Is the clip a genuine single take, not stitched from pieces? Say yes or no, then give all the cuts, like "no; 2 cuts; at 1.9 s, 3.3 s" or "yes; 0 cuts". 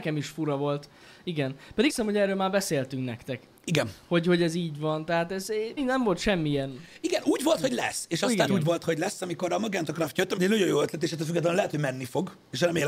no; 4 cuts; at 1.9 s, 5.8 s, 8.5 s, 10.4 s